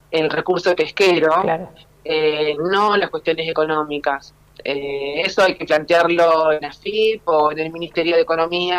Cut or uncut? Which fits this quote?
uncut